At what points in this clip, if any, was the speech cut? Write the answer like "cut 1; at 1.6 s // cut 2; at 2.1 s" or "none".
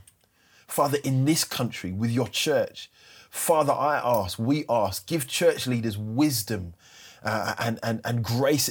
none